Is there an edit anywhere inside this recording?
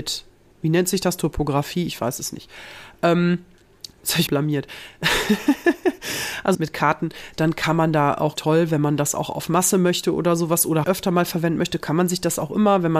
yes; 5 cuts; at 3.9 s, 4.3 s, 6.5 s, 8.4 s, 10.8 s

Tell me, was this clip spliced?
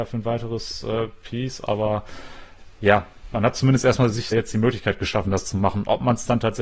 yes; 1 cut; at 4.3 s

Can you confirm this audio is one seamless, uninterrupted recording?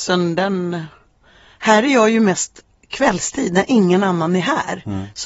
yes; 0 cuts

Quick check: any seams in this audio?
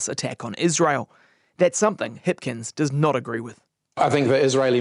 no; 0 cuts

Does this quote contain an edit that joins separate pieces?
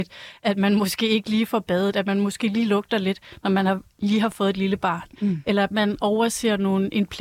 no; 0 cuts

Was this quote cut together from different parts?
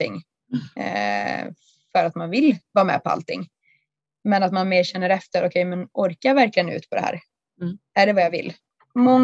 no; 0 cuts

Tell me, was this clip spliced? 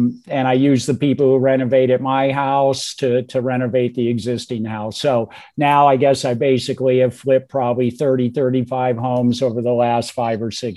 no; 0 cuts

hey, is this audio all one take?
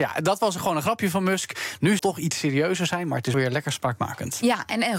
no; 2 cuts; at 2.0 s, 3.3 s

